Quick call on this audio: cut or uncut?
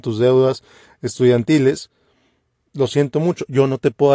uncut